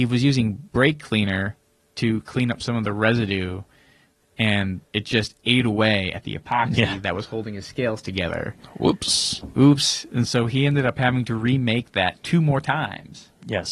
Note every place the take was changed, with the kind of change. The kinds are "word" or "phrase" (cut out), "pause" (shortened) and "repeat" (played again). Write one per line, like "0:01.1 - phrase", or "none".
0:04.9 - pause